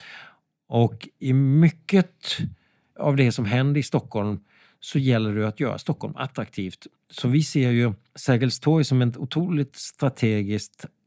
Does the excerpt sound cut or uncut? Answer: uncut